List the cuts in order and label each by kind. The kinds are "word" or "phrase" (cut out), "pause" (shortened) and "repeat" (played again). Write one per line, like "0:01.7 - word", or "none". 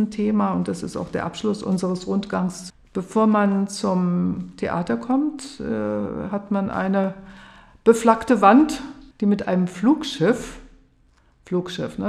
0:09.1 - pause